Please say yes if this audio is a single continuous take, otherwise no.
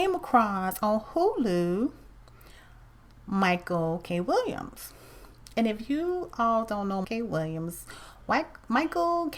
no